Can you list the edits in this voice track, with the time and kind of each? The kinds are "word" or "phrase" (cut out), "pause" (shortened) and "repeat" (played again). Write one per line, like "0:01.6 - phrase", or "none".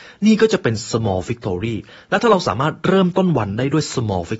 none